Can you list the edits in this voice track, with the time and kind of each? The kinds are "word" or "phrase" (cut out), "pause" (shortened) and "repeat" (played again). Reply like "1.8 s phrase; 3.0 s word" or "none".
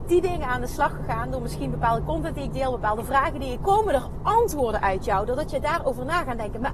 3.6 s word